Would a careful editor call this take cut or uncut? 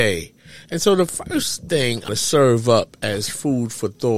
cut